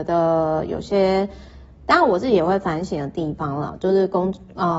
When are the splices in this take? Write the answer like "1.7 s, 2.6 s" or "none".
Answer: 1.7 s